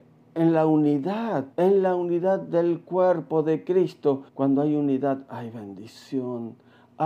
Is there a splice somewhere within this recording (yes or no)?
yes